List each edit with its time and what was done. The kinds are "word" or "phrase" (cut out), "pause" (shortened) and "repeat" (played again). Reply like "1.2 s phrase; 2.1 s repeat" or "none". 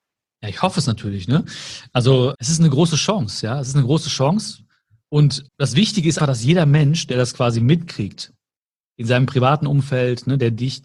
2.3 s word; 5.5 s pause; 6.2 s word